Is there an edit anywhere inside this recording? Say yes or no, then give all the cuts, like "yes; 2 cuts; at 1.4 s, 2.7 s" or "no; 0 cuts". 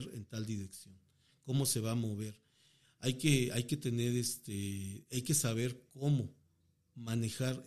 no; 0 cuts